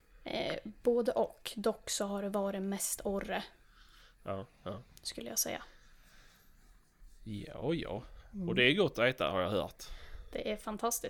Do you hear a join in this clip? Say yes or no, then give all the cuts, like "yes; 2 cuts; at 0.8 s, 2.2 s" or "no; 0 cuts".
no; 0 cuts